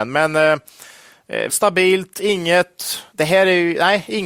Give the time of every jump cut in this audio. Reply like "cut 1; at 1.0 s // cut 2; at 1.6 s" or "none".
cut 1; at 1.5 s